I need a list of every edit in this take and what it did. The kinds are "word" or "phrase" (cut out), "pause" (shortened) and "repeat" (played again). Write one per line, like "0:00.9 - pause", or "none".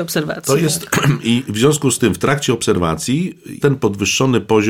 0:03.6 - word